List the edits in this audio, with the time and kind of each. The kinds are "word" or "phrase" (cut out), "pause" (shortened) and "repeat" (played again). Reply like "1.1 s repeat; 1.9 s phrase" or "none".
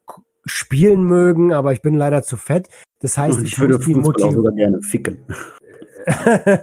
none